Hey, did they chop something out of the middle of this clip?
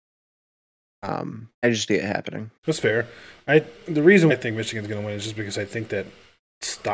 yes; 4 cuts; at 1.5 s, 1.9 s, 2.6 s, 4.3 s

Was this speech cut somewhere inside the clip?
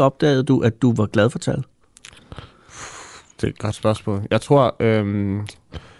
no; 0 cuts

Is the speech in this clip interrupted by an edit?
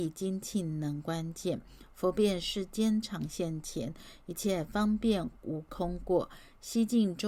no; 0 cuts

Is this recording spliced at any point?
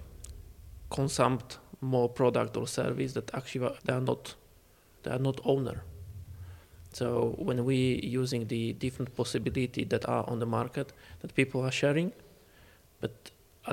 yes; 1 cut; at 3.8 s

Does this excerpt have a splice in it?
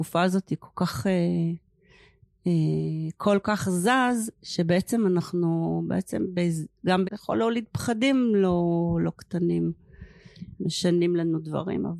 yes; 2 cuts; at 3.4 s, 7.0 s

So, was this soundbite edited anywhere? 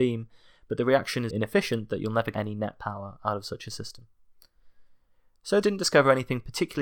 yes; 3 cuts; at 1.3 s, 2.3 s, 5.6 s

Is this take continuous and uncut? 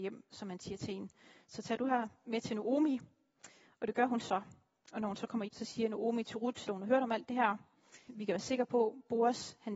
no; 3 cuts; at 5.5 s, 6.7 s, 8.1 s

